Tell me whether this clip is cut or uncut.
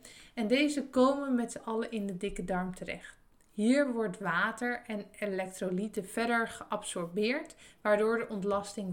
uncut